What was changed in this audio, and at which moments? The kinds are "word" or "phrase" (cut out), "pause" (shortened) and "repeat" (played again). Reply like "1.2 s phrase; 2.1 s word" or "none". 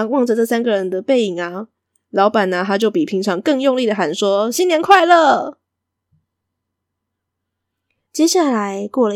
none